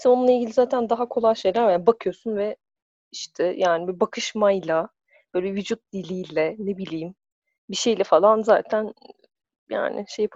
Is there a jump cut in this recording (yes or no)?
no